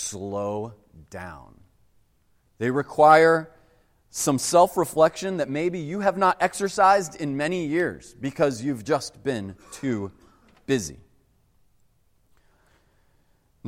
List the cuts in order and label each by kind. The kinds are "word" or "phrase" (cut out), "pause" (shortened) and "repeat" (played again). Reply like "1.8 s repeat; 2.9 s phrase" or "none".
none